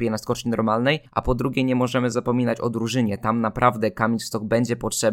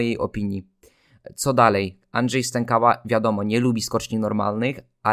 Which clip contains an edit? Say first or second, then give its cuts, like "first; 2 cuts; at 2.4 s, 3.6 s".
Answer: first; 1 cut; at 1.1 s